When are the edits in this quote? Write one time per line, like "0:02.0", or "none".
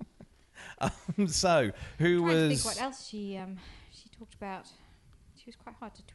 none